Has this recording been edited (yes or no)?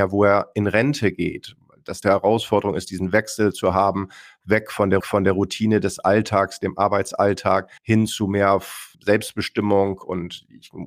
yes